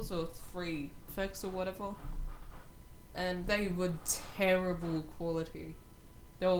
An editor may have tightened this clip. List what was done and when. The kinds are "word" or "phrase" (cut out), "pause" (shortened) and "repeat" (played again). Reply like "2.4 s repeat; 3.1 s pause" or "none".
1.1 s word; 3.4 s word